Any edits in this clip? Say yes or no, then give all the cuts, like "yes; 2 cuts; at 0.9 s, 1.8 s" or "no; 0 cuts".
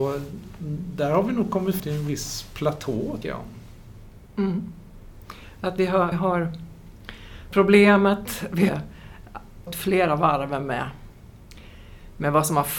yes; 6 cuts; at 1.8 s, 3.2 s, 6.1 s, 7.5 s, 8.7 s, 9.7 s